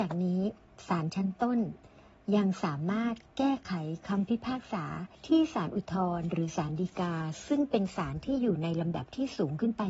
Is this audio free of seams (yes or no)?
no